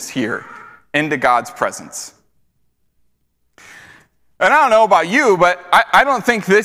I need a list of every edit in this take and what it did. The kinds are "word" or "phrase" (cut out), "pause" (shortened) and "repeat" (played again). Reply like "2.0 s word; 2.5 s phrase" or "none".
none

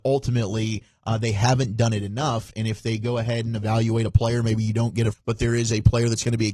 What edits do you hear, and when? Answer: 5.1 s phrase

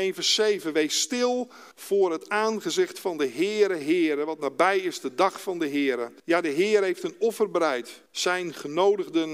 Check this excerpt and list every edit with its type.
1.7 s pause; 6.2 s pause; 8.1 s pause

